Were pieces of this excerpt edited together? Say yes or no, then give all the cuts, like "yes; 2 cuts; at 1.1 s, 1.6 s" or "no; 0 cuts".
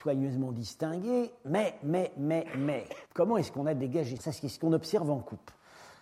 yes; 2 cuts; at 3.1 s, 4.2 s